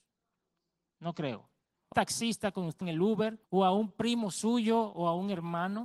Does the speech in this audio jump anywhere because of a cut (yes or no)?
yes